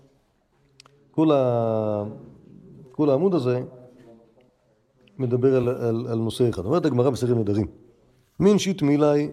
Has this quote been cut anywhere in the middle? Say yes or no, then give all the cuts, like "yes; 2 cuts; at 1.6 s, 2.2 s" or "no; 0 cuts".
no; 0 cuts